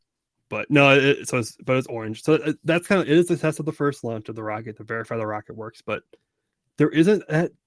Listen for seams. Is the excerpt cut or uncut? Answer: uncut